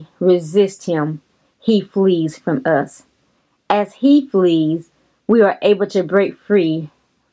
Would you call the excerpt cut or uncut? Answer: uncut